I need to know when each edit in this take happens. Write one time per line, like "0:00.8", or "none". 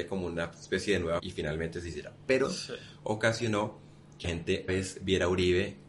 0:01.2
0:02.4
0:04.2
0:04.7